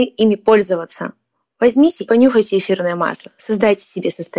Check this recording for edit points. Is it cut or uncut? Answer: cut